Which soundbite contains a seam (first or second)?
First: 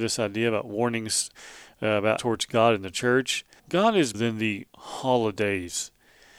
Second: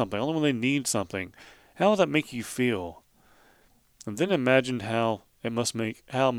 first